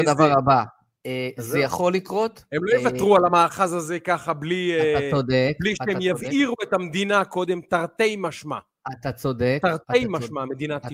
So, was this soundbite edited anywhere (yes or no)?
no